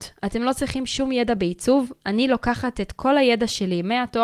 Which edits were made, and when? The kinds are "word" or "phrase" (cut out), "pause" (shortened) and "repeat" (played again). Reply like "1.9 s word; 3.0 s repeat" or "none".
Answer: none